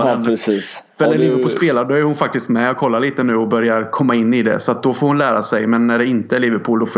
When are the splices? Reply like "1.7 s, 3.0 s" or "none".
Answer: none